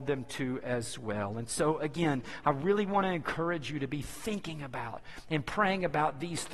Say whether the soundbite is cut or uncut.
uncut